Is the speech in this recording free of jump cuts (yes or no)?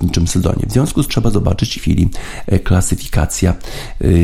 no